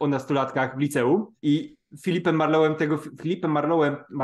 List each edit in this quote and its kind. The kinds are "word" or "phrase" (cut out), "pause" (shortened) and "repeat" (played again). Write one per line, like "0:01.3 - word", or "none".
0:01.4 - pause